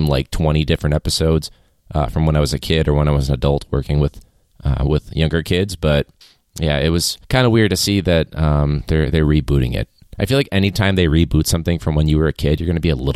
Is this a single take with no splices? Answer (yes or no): no